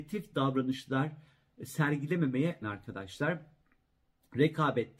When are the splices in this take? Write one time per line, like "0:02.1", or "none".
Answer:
0:02.6